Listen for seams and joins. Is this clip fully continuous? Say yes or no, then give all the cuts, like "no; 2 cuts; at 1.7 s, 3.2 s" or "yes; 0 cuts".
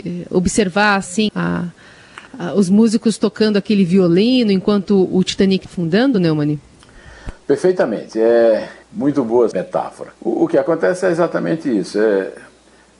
no; 6 cuts; at 1.3 s, 2.3 s, 5.7 s, 8.8 s, 9.5 s, 10.1 s